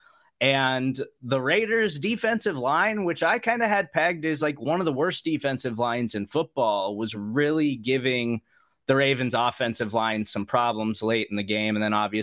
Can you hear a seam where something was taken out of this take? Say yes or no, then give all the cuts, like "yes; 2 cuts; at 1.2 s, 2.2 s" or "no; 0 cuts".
no; 0 cuts